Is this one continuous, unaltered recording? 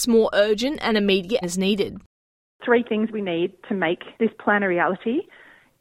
no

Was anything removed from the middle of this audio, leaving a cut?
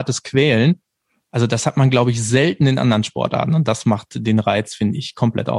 no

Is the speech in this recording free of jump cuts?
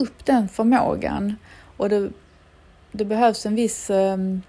yes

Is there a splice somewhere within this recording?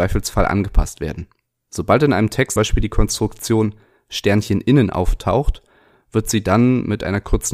yes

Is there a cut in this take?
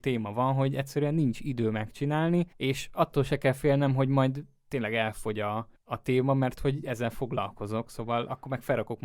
yes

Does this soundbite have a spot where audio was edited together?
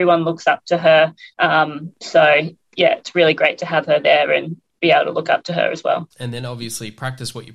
yes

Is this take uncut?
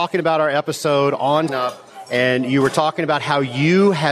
no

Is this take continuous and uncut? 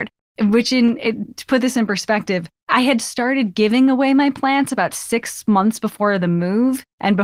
no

